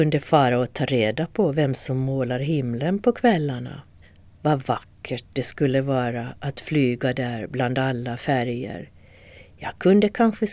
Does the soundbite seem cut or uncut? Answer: cut